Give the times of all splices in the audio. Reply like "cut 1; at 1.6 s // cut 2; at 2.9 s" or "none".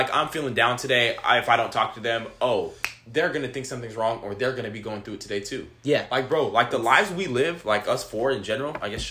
none